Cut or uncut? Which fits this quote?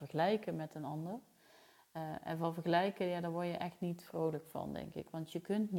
uncut